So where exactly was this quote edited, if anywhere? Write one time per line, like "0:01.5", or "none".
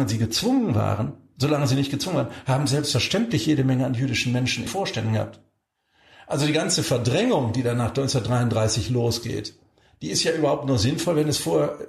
0:04.7